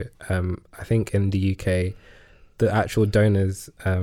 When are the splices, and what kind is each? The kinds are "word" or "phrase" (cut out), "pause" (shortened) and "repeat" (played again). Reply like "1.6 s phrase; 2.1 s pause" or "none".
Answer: none